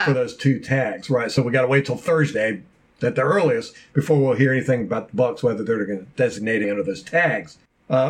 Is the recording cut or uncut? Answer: cut